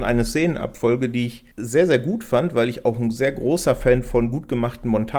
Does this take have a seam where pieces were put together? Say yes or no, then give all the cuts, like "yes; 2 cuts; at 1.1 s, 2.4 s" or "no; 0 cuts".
yes; 1 cut; at 1.5 s